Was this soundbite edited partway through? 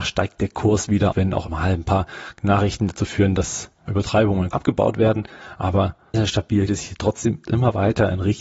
yes; 7 cuts; at 1.1 s, 1.5 s, 3.9 s, 4.5 s, 6.1 s, 6.7 s, 7.4 s

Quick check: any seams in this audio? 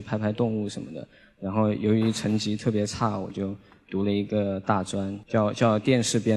no; 0 cuts

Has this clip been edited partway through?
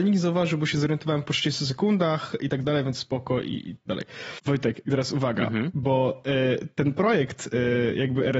yes; 3 cuts; at 2.6 s, 2.9 s, 3.9 s

